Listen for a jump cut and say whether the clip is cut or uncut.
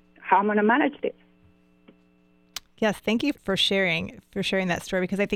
cut